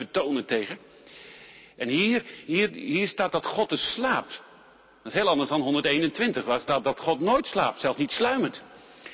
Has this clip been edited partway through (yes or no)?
no